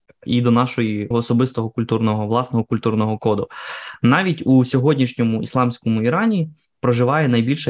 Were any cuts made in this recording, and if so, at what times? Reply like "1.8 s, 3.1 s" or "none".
1.1 s

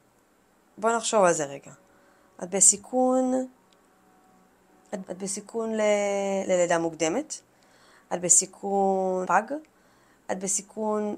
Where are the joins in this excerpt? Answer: 5.0 s, 9.2 s

